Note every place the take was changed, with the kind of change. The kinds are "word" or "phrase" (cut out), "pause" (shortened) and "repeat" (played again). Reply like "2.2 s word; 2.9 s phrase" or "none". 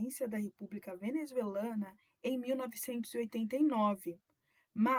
none